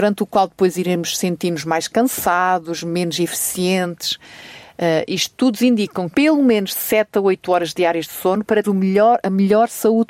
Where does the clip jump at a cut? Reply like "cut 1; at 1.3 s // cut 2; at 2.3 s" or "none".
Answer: cut 1; at 6.1 s // cut 2; at 8.6 s